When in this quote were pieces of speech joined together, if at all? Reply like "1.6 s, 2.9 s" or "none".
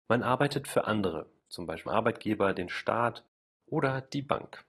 1.4 s, 1.9 s